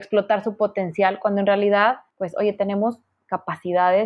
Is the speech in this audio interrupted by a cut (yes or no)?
no